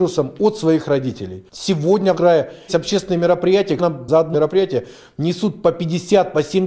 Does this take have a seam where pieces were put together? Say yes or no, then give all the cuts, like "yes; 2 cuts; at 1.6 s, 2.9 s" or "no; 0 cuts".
yes; 4 cuts; at 2.1 s, 2.7 s, 3.8 s, 4.3 s